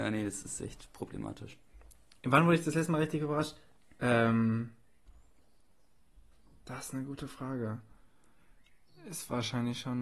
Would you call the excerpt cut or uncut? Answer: uncut